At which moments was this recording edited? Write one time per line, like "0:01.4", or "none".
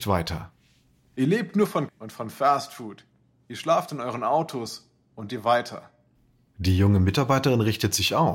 0:01.9
0:05.3